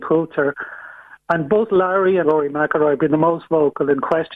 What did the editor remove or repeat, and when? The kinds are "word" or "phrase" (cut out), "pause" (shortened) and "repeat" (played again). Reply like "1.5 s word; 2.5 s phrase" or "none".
2.2 s word